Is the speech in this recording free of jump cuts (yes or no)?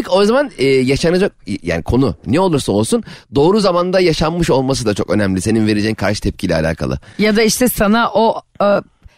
yes